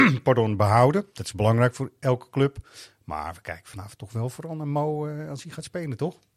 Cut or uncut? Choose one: cut